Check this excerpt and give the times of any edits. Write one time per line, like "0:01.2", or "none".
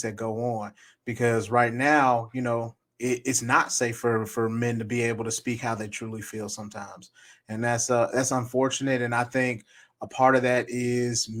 none